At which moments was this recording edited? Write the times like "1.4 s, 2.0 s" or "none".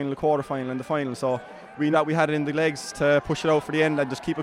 1.9 s